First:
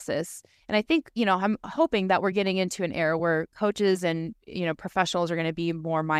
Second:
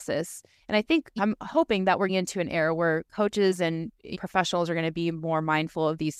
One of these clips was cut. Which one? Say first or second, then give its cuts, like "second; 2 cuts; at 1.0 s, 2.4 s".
second; 3 cuts; at 1.2 s, 2.1 s, 4.1 s